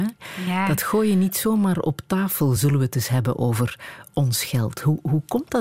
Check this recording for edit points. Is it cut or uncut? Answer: uncut